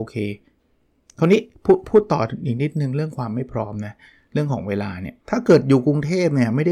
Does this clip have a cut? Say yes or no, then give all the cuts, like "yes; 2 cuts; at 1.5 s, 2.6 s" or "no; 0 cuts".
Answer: yes; 1 cut; at 5.2 s